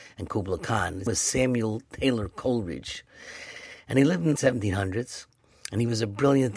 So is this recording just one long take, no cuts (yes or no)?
no